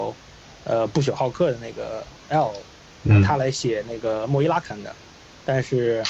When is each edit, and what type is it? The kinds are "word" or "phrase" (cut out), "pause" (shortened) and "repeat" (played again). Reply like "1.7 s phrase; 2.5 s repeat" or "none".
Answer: 2.2 s pause